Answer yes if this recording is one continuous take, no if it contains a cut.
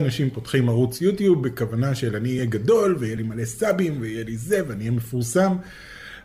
yes